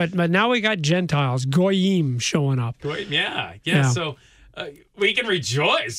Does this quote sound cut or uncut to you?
uncut